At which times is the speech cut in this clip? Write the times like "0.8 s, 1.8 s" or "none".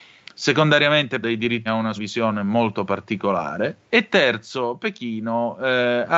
1.2 s, 1.7 s, 2.0 s, 3.9 s